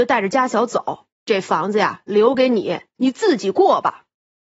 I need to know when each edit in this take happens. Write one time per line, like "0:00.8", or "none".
0:01.1